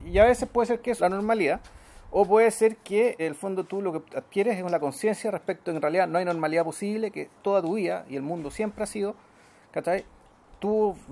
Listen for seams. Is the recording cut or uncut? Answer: cut